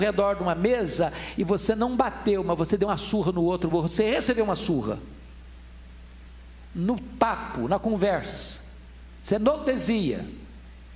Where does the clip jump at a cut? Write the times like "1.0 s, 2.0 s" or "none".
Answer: none